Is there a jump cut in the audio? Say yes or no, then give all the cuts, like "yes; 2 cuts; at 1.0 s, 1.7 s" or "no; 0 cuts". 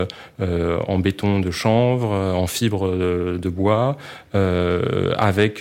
no; 0 cuts